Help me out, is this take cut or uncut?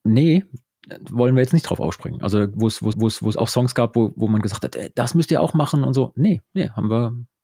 cut